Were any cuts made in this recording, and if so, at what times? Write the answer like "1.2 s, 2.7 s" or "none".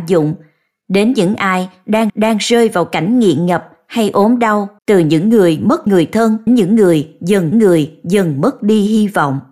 2.1 s, 4.8 s, 5.9 s, 6.5 s, 7.5 s